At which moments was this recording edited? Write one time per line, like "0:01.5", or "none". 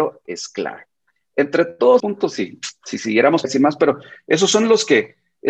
0:02.0
0:03.4